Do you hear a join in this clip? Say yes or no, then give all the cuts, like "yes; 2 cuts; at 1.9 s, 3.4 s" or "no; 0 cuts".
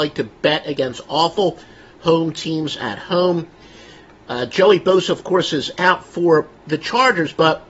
no; 0 cuts